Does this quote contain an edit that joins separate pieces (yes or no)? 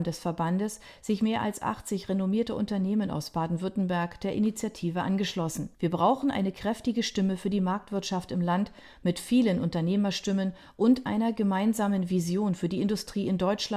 yes